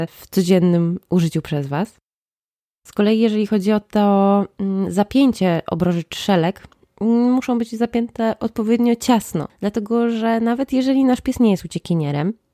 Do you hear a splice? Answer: no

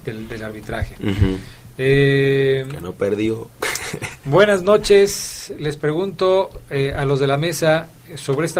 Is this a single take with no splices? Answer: yes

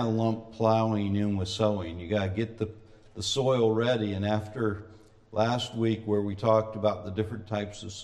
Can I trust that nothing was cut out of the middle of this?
yes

